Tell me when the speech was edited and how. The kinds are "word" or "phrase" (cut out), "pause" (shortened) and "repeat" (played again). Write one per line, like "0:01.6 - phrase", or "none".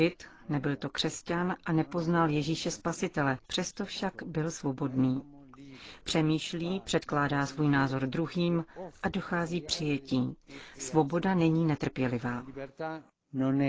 0:03.4 - pause